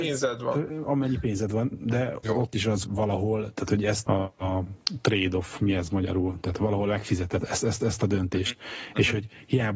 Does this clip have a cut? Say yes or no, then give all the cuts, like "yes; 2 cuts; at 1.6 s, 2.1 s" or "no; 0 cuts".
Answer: yes; 6 cuts; at 2.2 s, 2.8 s, 4.0 s, 6.6 s, 7.4 s, 7.8 s